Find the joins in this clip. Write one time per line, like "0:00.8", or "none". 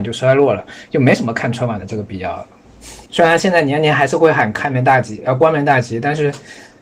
0:03.1